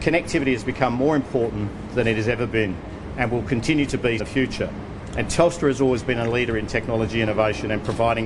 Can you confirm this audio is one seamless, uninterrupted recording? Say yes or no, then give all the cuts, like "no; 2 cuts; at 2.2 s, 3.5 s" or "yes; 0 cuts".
no; 1 cut; at 4.2 s